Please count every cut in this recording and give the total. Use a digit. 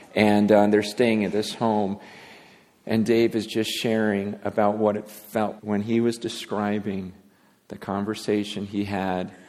1